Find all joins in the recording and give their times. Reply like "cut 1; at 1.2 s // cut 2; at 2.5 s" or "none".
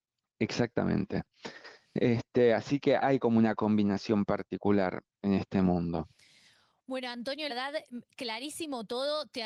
cut 1; at 3.0 s // cut 2; at 7.5 s